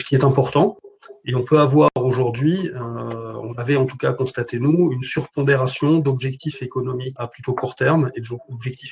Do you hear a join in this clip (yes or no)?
yes